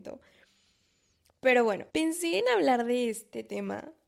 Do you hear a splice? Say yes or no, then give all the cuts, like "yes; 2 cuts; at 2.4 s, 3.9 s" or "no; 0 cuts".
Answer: yes; 1 cut; at 1.9 s